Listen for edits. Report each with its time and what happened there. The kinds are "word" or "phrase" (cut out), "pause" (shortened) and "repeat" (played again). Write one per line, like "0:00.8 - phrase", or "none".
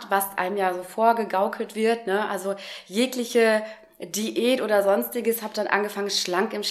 none

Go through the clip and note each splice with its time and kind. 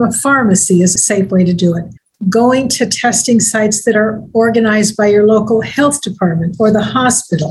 none

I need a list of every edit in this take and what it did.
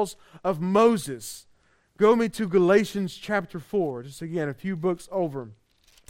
none

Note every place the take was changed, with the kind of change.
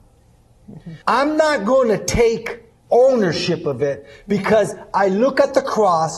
0:01.0 - pause
0:02.8 - pause

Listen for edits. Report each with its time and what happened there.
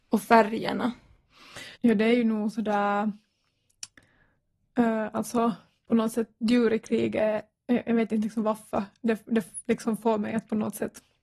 0:01.8 - pause

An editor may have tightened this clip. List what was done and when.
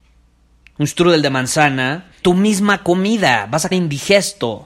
0:02.2 - word
0:03.7 - word

